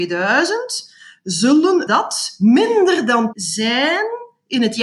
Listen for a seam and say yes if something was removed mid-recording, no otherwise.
yes